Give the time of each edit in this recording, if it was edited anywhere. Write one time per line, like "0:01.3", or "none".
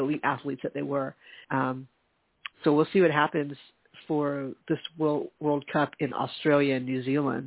0:01.4
0:04.6